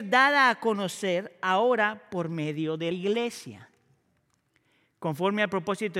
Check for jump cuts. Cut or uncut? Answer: cut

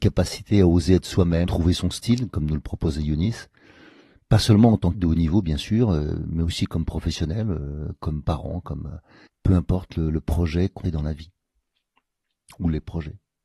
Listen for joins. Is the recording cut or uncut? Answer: cut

